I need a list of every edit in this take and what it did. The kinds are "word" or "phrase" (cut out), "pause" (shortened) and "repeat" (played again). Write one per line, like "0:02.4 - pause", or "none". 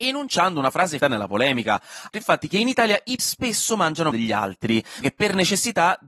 0:01.0 - word
0:02.1 - word
0:03.2 - word
0:04.1 - word
0:05.0 - word